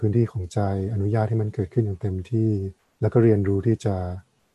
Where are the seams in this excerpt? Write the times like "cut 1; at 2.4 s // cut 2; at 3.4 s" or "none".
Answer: cut 1; at 2.8 s